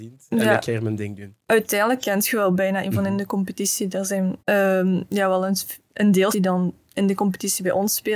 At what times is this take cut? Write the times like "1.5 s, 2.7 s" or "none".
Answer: 2.8 s, 4.4 s, 6.3 s